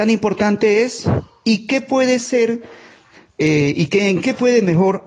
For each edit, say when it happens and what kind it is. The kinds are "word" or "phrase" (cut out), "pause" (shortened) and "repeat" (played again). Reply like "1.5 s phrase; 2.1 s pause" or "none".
none